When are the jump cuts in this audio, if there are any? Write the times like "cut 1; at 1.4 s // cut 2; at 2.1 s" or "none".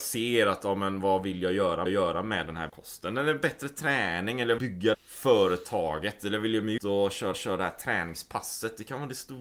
cut 1; at 1.9 s // cut 2; at 2.7 s // cut 3; at 4.6 s // cut 4; at 4.9 s // cut 5; at 6.8 s // cut 6; at 7.3 s